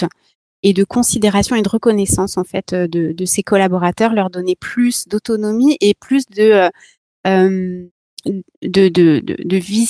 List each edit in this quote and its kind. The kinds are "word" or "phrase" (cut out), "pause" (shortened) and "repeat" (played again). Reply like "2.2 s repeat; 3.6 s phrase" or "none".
none